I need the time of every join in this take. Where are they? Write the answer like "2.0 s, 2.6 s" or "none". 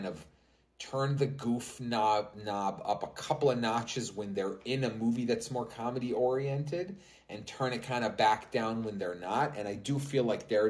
none